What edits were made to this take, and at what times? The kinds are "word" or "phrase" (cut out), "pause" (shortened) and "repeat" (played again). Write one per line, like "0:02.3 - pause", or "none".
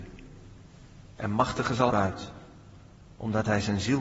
0:01.9 - phrase